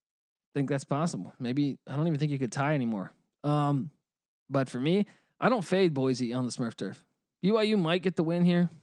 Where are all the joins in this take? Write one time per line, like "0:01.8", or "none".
0:04.3